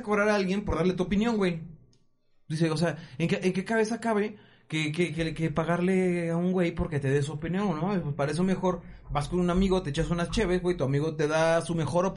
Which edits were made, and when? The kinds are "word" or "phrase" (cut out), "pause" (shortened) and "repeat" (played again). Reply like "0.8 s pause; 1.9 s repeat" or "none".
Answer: none